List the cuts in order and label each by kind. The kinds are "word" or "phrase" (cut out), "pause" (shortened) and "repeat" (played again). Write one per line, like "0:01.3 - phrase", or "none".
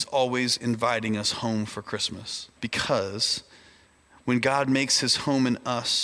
0:02.6 - pause